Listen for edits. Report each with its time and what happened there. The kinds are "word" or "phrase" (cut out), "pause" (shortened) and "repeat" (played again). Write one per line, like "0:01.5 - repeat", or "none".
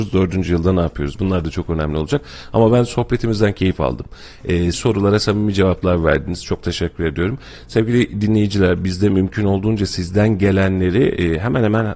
0:04.7 - word